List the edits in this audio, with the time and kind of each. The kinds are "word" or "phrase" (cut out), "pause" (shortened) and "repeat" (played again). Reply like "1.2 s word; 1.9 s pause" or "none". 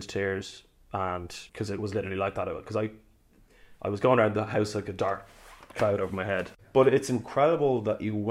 1.5 s pause